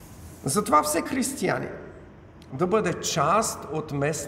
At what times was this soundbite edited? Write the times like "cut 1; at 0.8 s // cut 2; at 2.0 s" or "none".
cut 1; at 1.1 s // cut 2; at 2.5 s